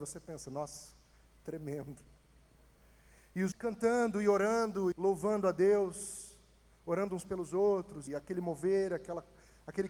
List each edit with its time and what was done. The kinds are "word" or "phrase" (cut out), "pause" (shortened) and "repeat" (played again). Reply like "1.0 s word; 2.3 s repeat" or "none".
3.5 s word; 4.9 s word; 8.1 s word